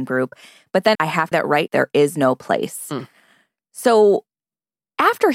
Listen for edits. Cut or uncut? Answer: cut